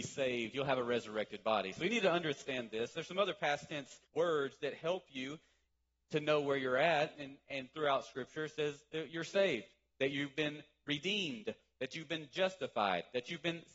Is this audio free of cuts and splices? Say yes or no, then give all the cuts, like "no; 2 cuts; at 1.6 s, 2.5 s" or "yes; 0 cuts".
no; 1 cut; at 4.1 s